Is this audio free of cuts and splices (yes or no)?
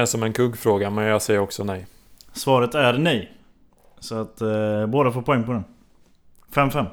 yes